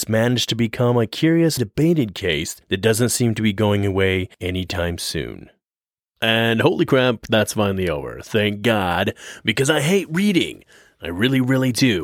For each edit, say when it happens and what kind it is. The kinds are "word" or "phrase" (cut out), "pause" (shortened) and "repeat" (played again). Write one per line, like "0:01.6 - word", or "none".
0:01.6 - phrase